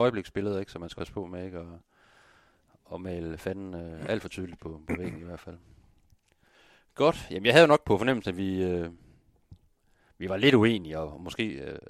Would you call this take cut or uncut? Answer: cut